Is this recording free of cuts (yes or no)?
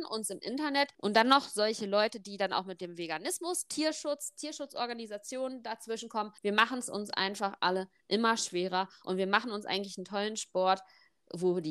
no